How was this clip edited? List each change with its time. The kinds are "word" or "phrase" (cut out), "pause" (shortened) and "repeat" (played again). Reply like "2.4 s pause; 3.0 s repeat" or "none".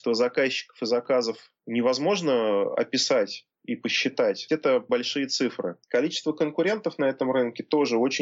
1.6 s pause; 4.9 s word; 5.8 s pause

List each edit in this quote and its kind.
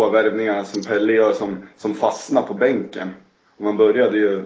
none

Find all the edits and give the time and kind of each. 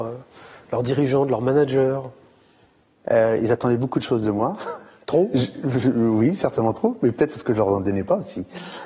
none

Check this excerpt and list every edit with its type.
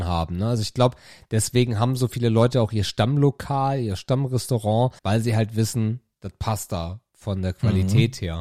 5.0 s pause

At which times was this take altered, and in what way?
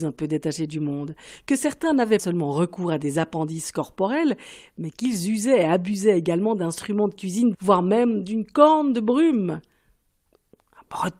2.2 s word; 7.5 s word

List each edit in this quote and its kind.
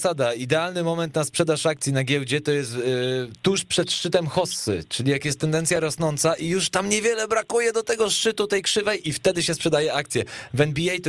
none

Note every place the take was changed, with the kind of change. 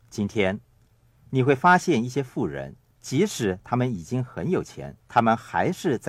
2.9 s pause; 5.0 s pause

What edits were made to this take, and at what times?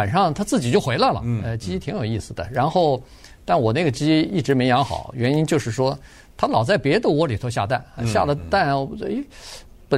none

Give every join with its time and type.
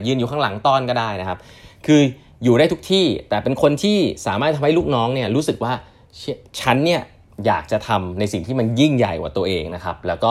none

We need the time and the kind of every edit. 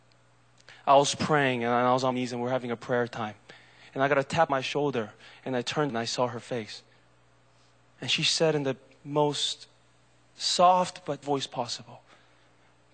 2.1 s word; 4.5 s word; 5.9 s word; 11.2 s word

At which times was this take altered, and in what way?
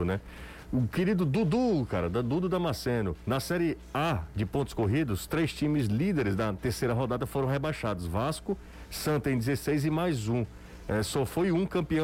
none

